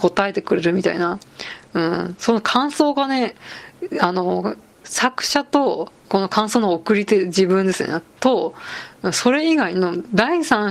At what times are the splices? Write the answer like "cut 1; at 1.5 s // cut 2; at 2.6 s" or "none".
cut 1; at 6.0 s